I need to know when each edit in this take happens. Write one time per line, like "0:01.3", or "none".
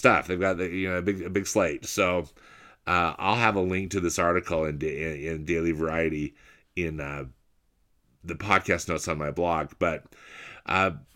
none